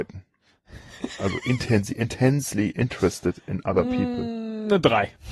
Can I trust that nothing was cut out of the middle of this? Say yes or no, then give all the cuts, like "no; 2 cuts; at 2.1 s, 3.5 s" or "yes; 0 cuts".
yes; 0 cuts